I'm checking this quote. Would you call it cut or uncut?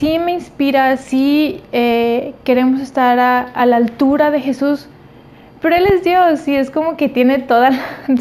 uncut